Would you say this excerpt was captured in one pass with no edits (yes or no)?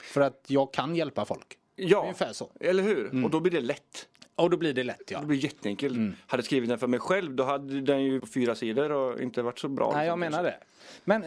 no